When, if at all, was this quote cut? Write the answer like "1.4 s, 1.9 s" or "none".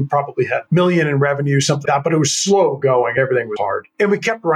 1.9 s, 3.6 s